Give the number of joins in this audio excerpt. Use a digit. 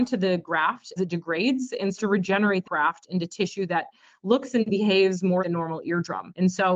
4